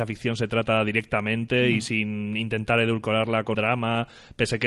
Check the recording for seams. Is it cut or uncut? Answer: cut